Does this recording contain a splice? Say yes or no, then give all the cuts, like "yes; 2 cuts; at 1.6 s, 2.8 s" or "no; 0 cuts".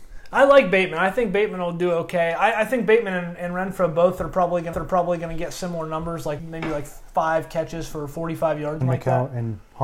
yes; 3 cuts; at 4.7 s, 6.4 s, 8.8 s